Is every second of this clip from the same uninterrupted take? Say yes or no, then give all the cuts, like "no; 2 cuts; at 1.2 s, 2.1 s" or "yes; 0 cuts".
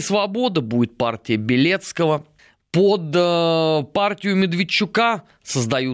no; 1 cut; at 2.4 s